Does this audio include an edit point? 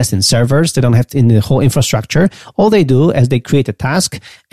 yes; 1 cut; at 1.1 s

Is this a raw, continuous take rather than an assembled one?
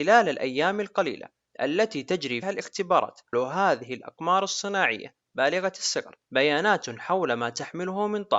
no; 3 cuts; at 2.4 s, 3.3 s, 6.2 s

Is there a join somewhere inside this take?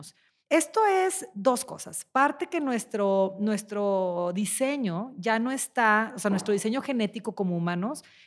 no; 0 cuts

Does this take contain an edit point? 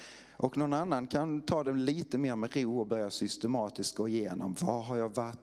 no; 0 cuts

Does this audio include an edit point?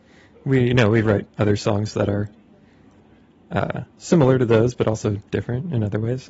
yes; 3 cuts; at 1.3 s, 3.9 s, 5.3 s

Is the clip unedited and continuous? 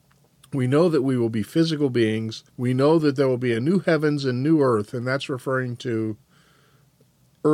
no; 1 cut; at 2.5 s

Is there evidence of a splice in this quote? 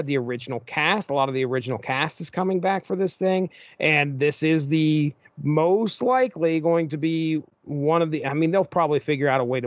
no; 0 cuts

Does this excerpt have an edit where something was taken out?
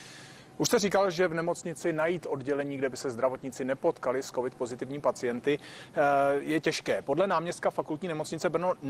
no; 0 cuts

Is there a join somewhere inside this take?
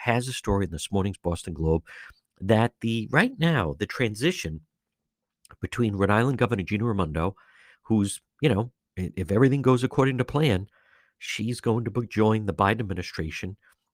no; 0 cuts

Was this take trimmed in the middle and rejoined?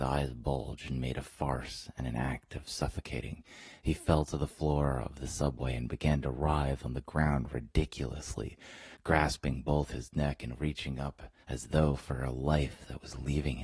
yes; 1 cut; at 11.4 s

